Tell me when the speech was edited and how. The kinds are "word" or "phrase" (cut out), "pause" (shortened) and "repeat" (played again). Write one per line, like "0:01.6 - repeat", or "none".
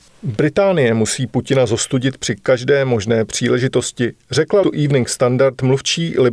0:04.6 - word